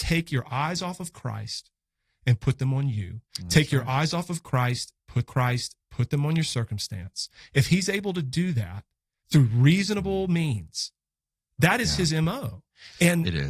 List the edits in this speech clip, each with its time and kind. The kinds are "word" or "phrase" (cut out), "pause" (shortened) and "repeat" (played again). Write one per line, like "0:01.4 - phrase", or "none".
0:03.3 - pause
0:05.3 - repeat